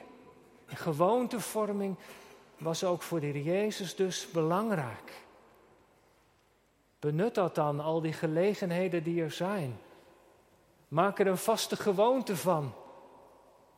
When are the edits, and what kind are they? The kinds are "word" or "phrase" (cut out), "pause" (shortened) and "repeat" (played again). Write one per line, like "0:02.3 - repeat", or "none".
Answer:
none